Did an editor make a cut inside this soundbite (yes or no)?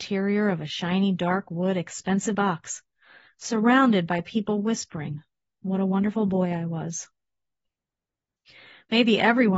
yes